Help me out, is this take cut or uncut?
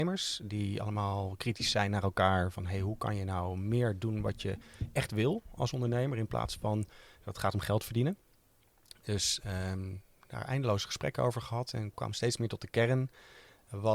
uncut